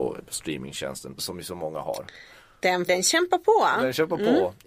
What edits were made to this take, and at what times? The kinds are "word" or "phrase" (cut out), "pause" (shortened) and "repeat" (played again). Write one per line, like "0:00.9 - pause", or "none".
0:01.2 - word
0:02.9 - word